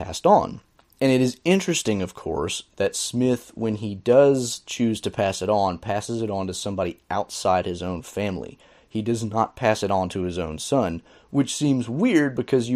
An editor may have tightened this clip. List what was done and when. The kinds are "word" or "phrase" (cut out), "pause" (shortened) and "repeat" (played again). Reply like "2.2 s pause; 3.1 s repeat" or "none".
none